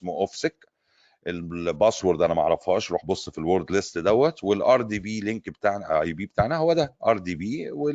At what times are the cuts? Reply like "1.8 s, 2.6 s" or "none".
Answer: none